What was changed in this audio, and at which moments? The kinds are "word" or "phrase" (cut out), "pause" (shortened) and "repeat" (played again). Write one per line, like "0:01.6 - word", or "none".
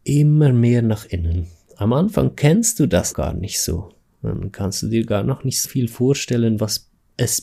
0:03.1 - word
0:05.6 - word